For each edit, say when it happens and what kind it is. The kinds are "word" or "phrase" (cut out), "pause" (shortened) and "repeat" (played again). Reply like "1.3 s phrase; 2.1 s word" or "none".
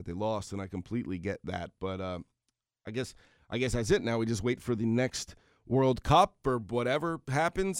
none